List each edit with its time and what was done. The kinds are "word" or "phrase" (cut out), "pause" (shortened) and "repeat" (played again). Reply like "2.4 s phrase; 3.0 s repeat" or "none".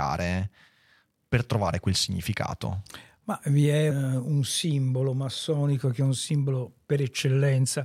3.9 s word